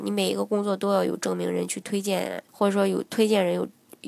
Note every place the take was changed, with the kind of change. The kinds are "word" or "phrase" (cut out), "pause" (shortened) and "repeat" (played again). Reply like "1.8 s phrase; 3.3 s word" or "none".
2.5 s pause